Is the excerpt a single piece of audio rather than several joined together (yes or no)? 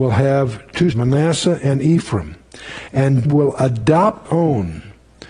no